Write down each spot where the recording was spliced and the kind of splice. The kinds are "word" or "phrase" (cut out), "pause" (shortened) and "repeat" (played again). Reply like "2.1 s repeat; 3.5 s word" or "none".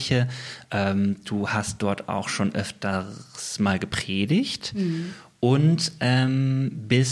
none